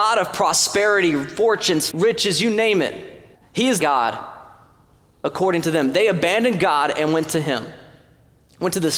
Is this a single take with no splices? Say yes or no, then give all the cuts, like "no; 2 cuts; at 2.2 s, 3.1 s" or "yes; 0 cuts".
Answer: no; 3 cuts; at 1.9 s, 3.3 s, 3.8 s